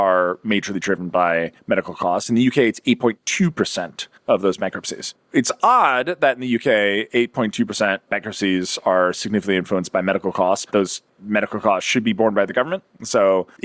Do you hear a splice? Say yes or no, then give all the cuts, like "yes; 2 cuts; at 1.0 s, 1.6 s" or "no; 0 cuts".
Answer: yes; 2 cuts; at 8.1 s, 10.6 s